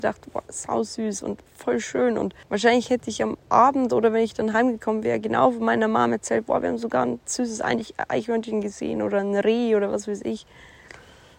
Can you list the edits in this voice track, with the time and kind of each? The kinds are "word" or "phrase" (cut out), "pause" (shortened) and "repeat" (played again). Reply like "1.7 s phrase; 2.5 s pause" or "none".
2.4 s pause